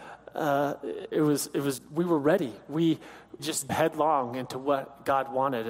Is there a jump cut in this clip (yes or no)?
yes